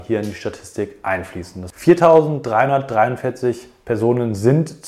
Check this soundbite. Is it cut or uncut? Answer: cut